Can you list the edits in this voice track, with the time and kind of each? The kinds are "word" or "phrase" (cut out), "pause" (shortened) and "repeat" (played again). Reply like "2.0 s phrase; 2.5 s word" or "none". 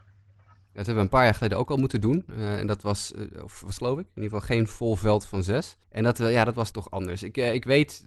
3.8 s phrase; 5.8 s pause; 6.7 s word